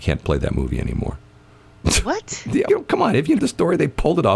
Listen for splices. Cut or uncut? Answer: cut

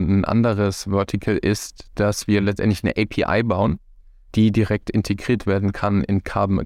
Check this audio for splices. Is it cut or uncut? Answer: uncut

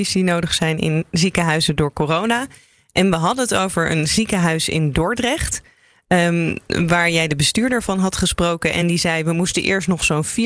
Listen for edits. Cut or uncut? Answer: uncut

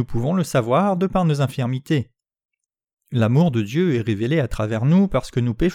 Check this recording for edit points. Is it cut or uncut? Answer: uncut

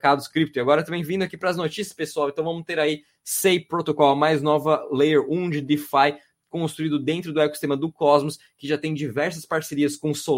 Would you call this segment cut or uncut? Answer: uncut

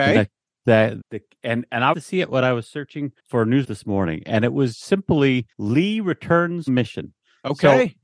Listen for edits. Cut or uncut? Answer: cut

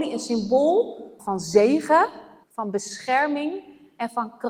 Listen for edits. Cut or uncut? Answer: cut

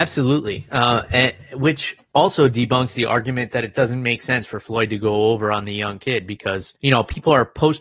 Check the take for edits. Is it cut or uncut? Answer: cut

